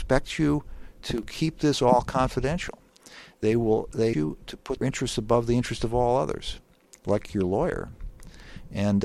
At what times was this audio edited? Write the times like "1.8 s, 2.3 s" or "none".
4.1 s, 4.8 s, 7.3 s